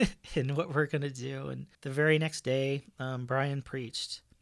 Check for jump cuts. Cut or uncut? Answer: cut